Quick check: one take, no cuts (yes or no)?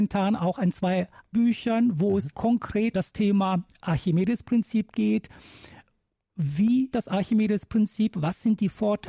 no